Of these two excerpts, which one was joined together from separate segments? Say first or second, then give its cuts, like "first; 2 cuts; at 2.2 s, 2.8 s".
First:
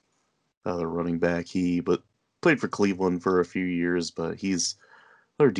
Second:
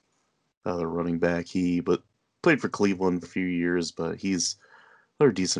second; 1 cut; at 3.2 s